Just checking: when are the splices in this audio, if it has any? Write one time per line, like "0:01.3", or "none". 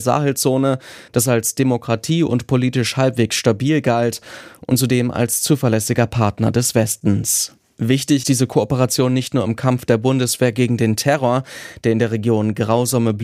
0:08.2